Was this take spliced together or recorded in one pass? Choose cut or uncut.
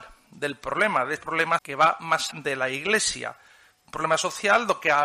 cut